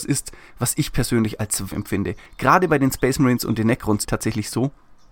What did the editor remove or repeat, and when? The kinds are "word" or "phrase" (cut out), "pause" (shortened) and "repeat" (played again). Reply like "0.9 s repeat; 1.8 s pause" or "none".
1.7 s phrase; 2.3 s pause; 4.0 s phrase